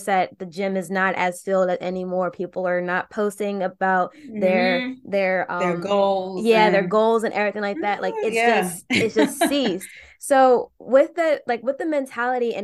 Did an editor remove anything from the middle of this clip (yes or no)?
no